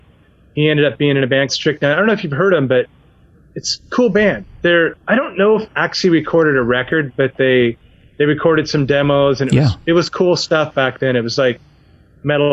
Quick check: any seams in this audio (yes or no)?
yes